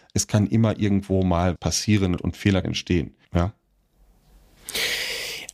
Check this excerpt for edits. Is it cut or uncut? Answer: cut